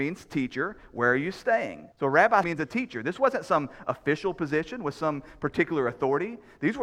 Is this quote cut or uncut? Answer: cut